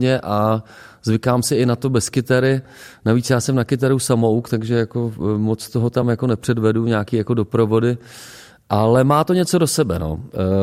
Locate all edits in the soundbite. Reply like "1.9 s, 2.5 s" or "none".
none